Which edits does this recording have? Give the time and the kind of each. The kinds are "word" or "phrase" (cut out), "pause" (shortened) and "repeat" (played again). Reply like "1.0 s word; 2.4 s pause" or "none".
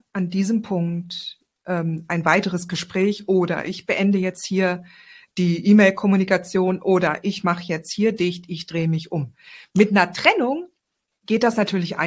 none